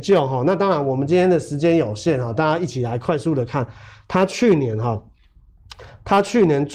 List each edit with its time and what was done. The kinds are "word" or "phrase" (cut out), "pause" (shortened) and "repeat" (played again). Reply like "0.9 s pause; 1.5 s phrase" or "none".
none